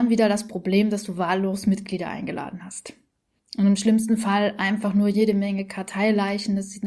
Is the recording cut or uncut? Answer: uncut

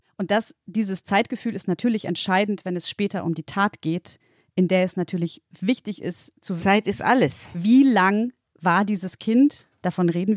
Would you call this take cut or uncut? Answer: cut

